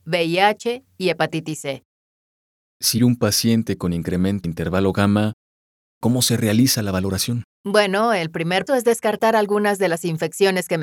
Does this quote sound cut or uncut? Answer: cut